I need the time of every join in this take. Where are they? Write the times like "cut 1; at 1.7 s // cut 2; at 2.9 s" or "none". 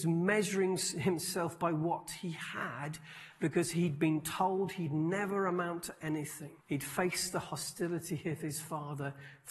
cut 1; at 6.6 s